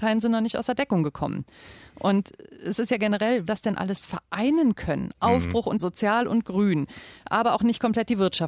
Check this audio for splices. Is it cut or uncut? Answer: cut